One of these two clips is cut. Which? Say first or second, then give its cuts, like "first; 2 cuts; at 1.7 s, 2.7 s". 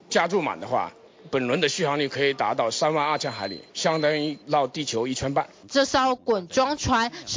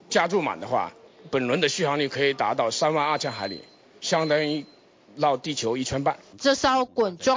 first; 2 cuts; at 3.7 s, 4.4 s